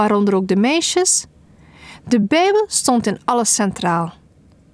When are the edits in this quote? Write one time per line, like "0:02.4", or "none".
none